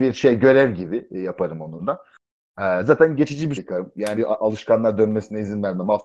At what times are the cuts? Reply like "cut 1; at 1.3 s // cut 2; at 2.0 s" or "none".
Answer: cut 1; at 1.8 s // cut 2; at 3.6 s // cut 3; at 4.2 s